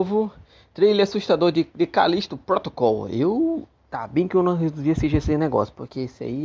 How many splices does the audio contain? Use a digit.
1